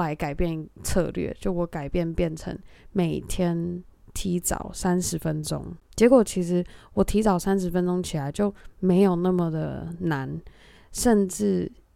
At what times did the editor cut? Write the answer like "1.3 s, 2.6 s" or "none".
none